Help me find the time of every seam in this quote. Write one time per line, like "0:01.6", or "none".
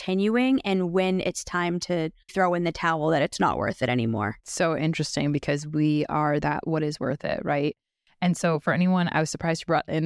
0:02.3
0:04.4
0:06.4